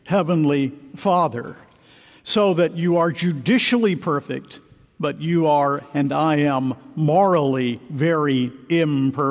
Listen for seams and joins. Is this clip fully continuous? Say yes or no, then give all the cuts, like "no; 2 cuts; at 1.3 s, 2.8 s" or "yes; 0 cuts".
yes; 0 cuts